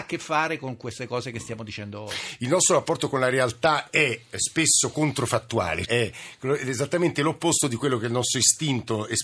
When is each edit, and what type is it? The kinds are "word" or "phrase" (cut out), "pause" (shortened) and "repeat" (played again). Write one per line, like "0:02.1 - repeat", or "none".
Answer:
0:05.9 - word